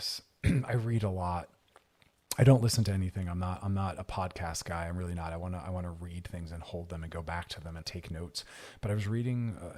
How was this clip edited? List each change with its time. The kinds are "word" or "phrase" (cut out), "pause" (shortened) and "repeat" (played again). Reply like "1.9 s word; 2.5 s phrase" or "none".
7.8 s phrase